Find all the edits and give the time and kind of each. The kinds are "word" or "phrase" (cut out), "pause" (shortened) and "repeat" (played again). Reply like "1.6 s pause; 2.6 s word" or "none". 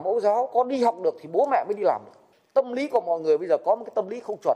none